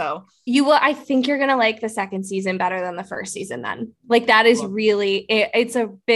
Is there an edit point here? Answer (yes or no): no